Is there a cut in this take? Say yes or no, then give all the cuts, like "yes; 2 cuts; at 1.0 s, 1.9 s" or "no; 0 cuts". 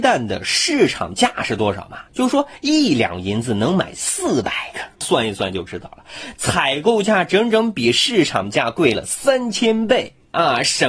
yes; 2 cuts; at 2.1 s, 5.0 s